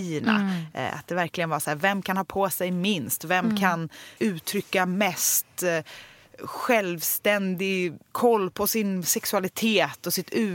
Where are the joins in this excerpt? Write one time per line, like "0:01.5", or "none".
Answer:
0:04.2